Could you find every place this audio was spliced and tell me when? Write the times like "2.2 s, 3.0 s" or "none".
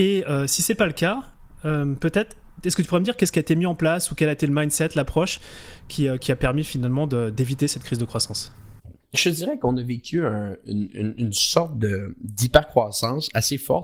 none